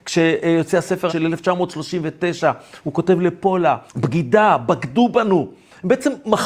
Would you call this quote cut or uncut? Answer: cut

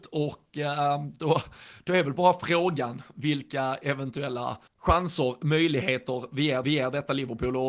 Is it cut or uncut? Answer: cut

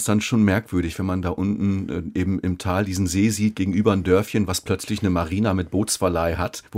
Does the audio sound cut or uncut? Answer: uncut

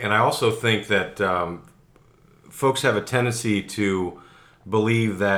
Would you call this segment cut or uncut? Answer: uncut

